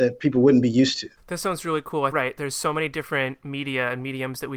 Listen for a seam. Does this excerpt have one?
yes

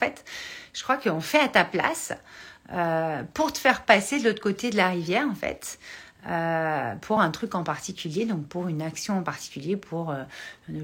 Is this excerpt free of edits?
yes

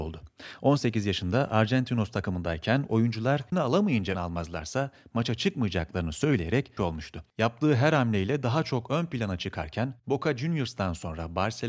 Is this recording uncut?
no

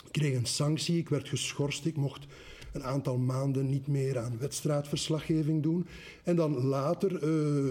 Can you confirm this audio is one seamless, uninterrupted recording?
yes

